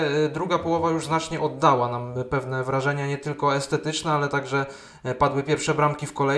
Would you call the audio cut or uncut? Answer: uncut